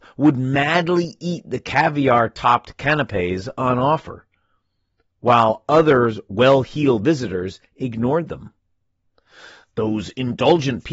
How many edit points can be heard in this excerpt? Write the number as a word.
zero